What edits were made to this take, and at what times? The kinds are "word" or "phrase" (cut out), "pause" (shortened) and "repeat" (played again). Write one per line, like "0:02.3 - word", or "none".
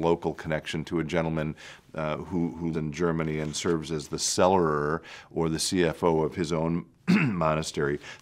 0:02.7 - word